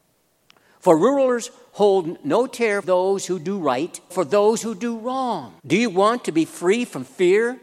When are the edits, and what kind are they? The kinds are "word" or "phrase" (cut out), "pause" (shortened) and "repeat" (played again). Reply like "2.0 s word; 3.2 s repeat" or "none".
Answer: 2.8 s word; 4.1 s word; 5.6 s pause